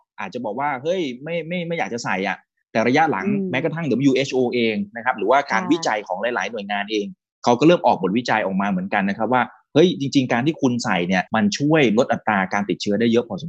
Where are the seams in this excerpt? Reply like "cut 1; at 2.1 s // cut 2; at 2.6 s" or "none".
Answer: cut 1; at 11.3 s